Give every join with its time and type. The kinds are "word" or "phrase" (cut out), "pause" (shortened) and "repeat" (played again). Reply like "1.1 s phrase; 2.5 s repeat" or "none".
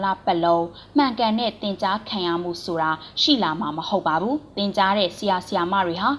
4.5 s pause